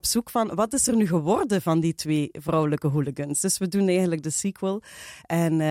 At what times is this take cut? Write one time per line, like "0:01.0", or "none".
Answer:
none